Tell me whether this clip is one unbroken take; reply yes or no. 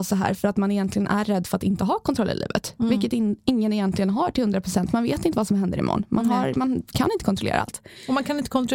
yes